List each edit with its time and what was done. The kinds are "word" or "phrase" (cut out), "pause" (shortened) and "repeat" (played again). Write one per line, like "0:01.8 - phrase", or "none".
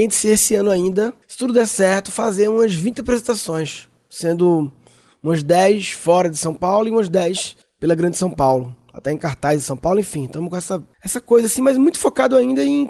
0:01.2 - pause
0:07.6 - pause